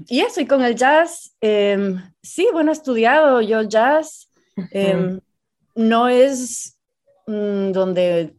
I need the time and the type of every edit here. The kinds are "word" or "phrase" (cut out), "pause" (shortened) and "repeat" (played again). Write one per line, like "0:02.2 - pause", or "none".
none